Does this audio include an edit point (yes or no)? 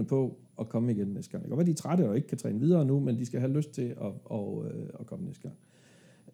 no